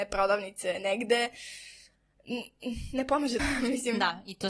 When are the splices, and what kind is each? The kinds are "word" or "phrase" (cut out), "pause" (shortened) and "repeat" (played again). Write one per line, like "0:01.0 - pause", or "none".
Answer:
0:03.4 - word